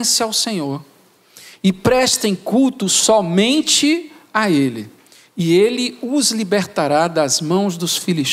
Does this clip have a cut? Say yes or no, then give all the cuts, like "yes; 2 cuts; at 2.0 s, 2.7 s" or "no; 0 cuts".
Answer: no; 0 cuts